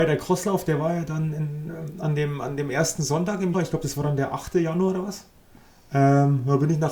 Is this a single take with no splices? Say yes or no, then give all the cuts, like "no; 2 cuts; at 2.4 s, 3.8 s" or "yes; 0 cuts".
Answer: no; 1 cut; at 3.5 s